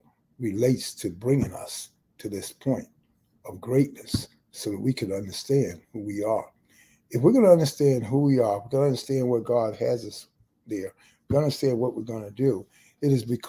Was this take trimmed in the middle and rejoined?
no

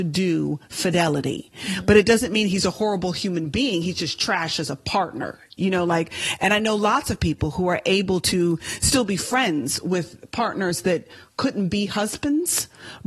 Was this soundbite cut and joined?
no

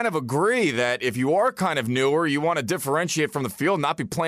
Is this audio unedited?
yes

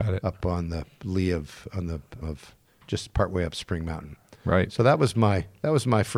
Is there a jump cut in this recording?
yes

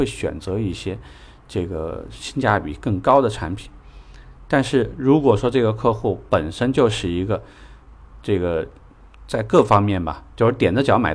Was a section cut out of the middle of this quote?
no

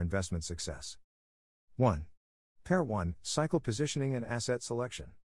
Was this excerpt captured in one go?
yes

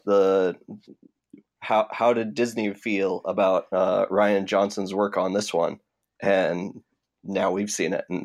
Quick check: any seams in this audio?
no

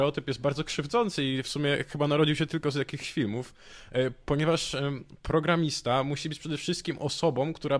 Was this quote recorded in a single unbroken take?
yes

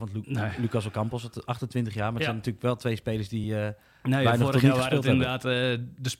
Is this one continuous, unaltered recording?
yes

